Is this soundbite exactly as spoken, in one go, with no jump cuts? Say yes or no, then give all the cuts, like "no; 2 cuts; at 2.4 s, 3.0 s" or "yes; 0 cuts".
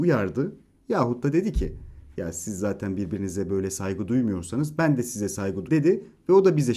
no; 1 cut; at 5.7 s